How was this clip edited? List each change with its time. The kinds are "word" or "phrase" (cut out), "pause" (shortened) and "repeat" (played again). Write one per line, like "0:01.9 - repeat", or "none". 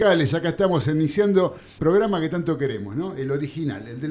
0:01.8 - word